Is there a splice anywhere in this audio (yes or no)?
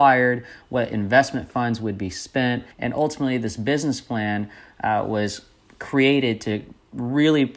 yes